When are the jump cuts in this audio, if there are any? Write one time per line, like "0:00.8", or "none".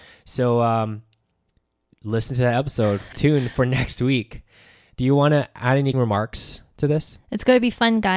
0:03.1
0:05.9